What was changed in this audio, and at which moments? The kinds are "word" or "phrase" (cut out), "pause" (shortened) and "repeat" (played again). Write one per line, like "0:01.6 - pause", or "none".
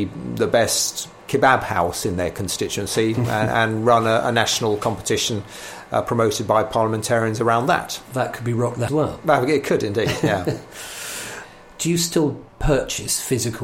0:08.9 - phrase
0:12.5 - pause